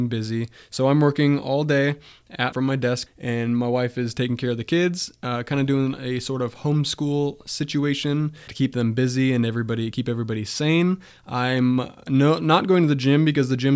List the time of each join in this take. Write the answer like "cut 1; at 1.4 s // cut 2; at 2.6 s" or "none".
cut 1; at 2.5 s // cut 2; at 3.1 s // cut 3; at 8.5 s